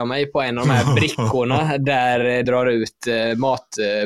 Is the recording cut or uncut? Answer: cut